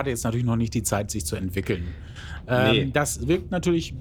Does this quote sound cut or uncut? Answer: uncut